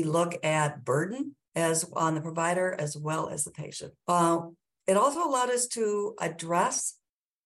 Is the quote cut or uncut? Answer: cut